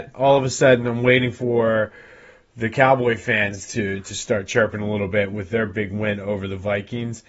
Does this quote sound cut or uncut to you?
uncut